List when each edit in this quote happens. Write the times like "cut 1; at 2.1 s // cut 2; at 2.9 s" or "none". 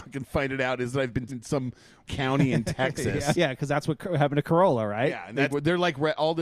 cut 1; at 1.3 s // cut 2; at 2.1 s // cut 3; at 3.3 s // cut 4; at 5.5 s